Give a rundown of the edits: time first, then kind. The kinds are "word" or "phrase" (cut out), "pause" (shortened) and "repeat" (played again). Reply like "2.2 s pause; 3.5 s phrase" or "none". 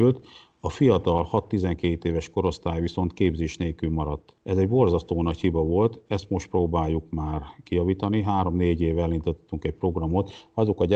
4.4 s pause